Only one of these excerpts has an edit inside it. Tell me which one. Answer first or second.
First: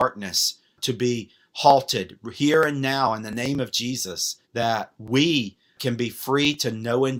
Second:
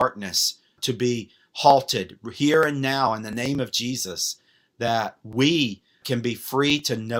first